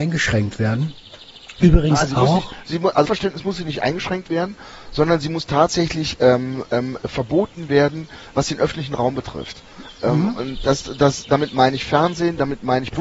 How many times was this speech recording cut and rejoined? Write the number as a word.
one